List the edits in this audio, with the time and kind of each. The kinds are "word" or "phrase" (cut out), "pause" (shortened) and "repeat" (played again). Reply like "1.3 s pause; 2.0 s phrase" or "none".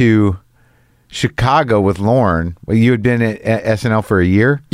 none

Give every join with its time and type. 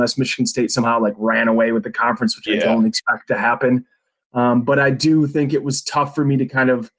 none

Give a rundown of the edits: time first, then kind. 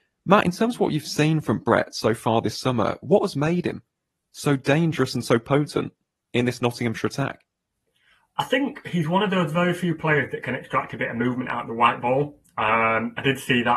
none

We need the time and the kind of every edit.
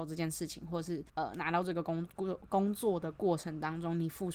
1.1 s pause

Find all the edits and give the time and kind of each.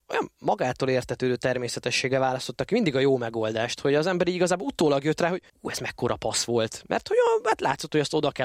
5.5 s pause

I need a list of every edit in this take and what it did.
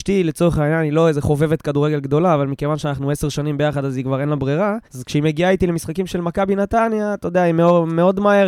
4.9 s pause

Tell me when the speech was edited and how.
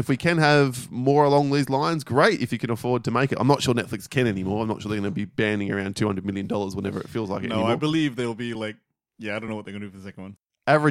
none

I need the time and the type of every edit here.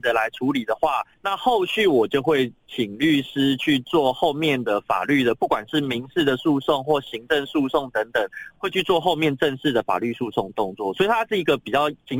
1.1 s pause

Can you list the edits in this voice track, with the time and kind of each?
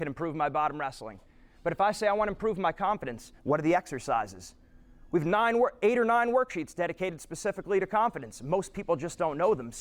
3.4 s pause

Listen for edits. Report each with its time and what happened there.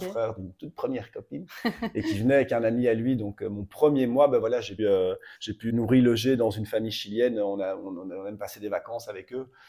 4.8 s word; 5.3 s pause; 5.7 s word

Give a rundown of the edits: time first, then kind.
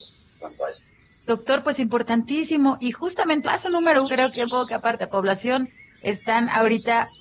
3.4 s word; 4.0 s word; 4.5 s word; 5.0 s word

